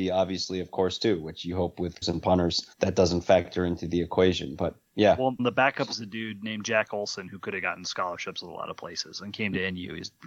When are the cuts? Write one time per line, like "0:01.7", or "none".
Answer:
0:02.0
0:02.7
0:04.9
0:05.4